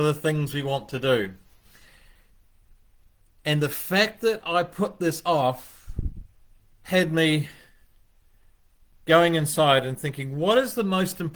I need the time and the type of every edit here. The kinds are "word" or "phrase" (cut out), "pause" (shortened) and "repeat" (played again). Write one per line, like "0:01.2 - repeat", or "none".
none